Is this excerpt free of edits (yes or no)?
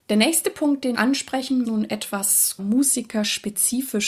no